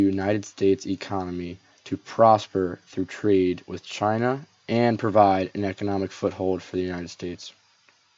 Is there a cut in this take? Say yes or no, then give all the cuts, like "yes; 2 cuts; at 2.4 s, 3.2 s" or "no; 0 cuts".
no; 0 cuts